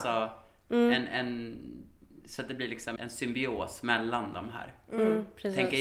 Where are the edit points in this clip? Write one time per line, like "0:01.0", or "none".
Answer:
0:03.0